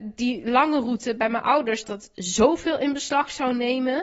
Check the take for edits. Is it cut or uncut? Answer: cut